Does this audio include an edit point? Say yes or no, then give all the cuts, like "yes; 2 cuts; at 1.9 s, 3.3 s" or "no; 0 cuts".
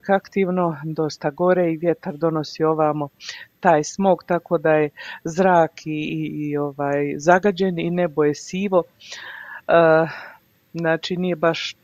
no; 0 cuts